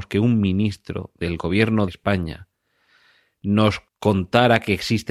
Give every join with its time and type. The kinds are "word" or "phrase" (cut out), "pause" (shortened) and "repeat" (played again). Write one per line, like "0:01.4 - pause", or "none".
0:01.9 - word
0:03.9 - pause